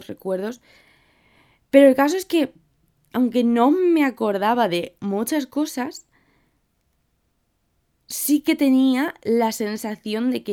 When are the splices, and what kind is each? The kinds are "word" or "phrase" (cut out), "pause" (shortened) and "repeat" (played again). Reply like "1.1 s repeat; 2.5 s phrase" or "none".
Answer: none